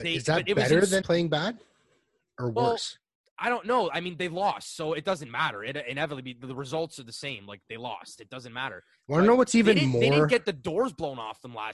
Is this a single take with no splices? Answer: no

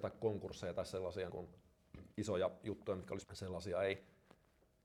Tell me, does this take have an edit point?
yes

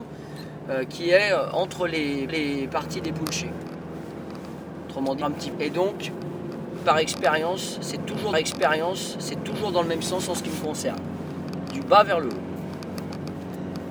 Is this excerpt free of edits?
no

